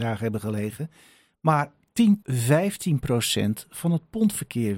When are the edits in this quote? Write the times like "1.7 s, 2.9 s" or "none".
2.2 s